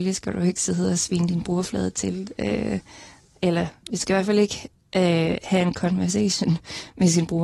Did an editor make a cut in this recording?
no; 0 cuts

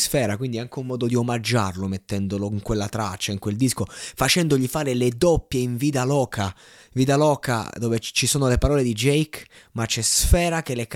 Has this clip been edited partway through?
no; 0 cuts

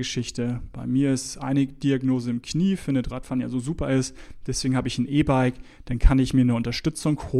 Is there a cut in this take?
yes; 1 cut; at 3.1 s

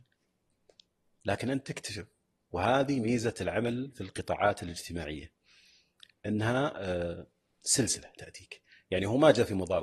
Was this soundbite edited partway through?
no; 0 cuts

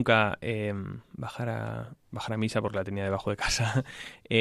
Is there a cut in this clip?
no; 0 cuts

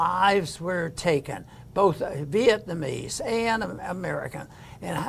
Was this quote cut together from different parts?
no; 0 cuts

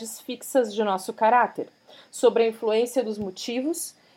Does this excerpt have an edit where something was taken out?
no; 0 cuts

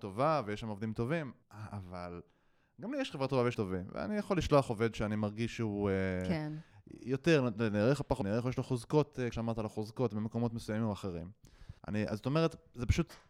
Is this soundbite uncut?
no; 5 cuts; at 1.4 s, 3.5 s, 8.2 s, 9.3 s, 11.8 s

